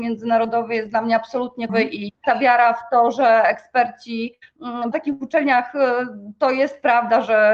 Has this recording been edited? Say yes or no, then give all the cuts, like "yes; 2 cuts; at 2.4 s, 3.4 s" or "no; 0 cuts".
yes; 3 cuts; at 1.7 s, 2.2 s, 4.9 s